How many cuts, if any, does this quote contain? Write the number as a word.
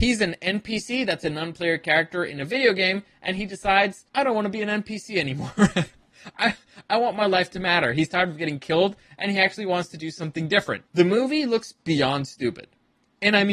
two